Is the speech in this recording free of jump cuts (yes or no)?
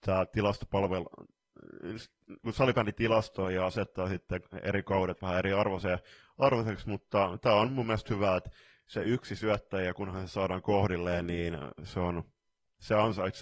yes